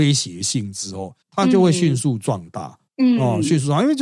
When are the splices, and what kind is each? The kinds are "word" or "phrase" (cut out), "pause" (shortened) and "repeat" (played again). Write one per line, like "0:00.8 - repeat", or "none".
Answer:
0:01.2 - pause
0:02.9 - pause